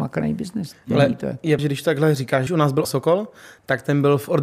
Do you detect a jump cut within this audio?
yes; 3 cuts; at 1.6 s, 2.5 s, 2.8 s

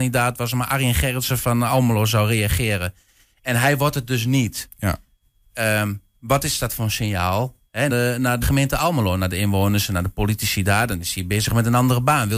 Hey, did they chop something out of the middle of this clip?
yes; 2 cuts; at 7.9 s, 8.4 s

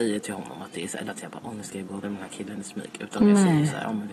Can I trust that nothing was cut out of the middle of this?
no; 2 cuts; at 1.1 s, 2.0 s

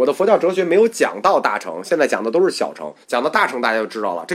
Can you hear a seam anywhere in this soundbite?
yes; 1 cut; at 3.0 s

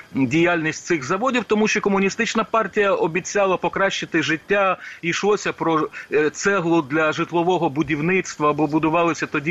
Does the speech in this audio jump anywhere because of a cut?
no; 0 cuts

